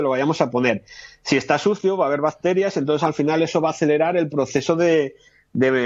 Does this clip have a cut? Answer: no; 0 cuts

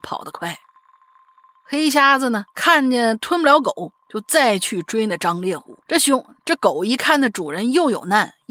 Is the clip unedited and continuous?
no; 2 cuts; at 2.5 s, 5.8 s

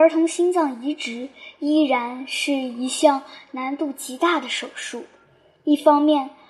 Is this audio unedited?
yes; 0 cuts

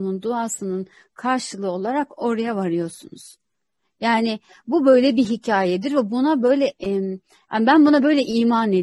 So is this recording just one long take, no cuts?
yes; 0 cuts

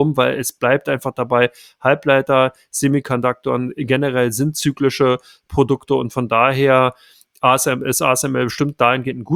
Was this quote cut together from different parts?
no; 0 cuts

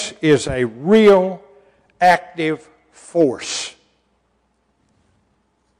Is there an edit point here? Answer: no; 0 cuts

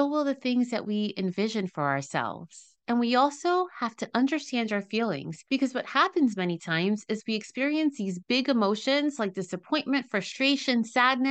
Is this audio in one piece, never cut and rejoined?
no; 1 cut; at 5.5 s

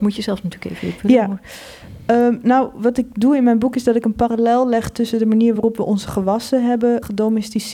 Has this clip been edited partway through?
no; 0 cuts

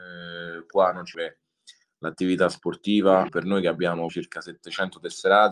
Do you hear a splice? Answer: yes; 3 cuts; at 1.1 s, 3.3 s, 4.1 s

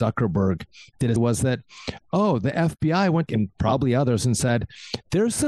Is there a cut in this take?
yes; 2 cuts; at 1.2 s, 3.3 s

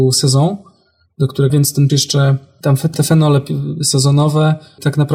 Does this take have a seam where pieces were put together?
yes; 3 cuts; at 1.5 s, 1.9 s, 2.9 s

